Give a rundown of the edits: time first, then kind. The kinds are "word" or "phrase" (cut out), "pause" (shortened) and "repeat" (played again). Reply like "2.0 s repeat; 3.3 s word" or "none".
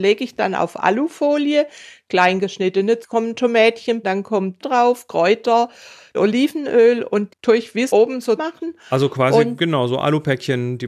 3.0 s word; 4.0 s word; 4.6 s word; 6.1 s word; 7.3 s word; 7.9 s word; 8.4 s word